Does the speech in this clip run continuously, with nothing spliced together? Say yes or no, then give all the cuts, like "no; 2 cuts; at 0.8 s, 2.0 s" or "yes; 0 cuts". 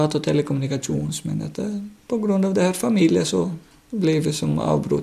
yes; 0 cuts